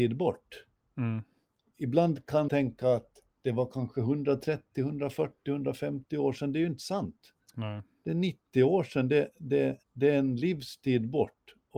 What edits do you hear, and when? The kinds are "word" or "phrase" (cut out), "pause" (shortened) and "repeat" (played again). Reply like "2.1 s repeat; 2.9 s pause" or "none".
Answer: 2.5 s word; 3.3 s pause; 7.4 s pause; 9.8 s pause